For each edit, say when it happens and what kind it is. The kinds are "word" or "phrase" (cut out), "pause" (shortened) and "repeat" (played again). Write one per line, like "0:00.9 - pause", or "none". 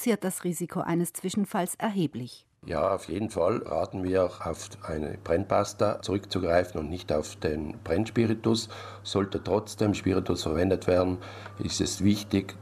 0:02.6 - pause